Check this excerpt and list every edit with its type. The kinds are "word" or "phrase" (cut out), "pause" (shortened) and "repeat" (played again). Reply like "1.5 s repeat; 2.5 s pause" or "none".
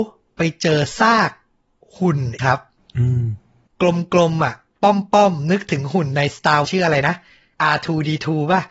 2.4 s word; 6.6 s word